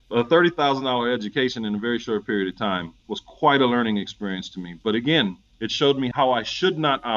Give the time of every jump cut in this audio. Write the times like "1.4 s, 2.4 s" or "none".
3.0 s